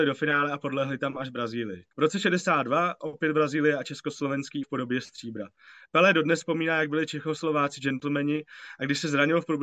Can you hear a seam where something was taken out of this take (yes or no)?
yes